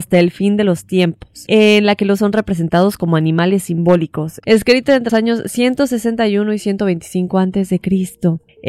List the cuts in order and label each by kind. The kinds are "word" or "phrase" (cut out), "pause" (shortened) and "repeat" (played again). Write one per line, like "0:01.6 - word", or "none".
0:02.2 - word
0:05.1 - word